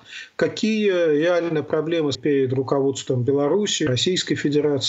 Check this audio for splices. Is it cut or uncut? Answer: cut